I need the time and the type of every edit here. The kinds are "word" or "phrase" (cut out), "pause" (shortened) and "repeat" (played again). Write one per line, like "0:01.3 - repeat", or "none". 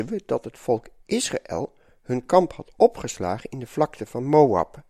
none

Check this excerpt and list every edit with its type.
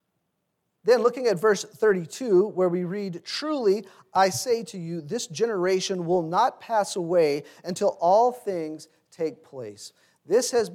none

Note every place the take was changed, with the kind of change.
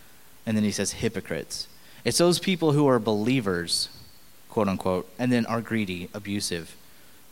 none

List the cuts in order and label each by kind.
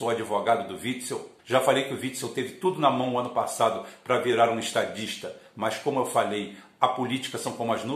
0:01.4 - pause

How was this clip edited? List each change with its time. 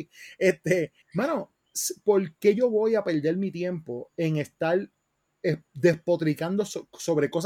0:01.0 - pause

